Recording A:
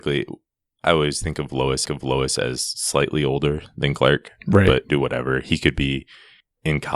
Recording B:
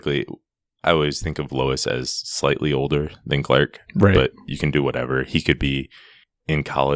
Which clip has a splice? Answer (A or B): A